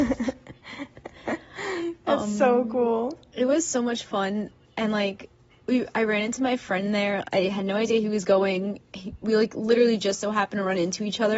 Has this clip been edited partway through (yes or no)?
no